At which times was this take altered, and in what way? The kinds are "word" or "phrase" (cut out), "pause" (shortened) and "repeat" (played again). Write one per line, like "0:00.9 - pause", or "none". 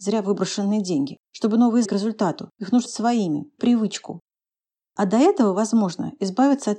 0:01.3 - pause
0:01.9 - phrase
0:02.5 - pause
0:02.9 - word
0:03.6 - phrase